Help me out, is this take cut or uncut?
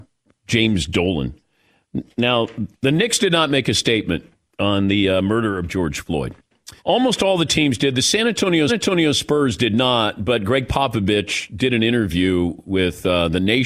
cut